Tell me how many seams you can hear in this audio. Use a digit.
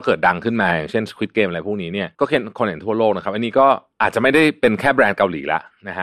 1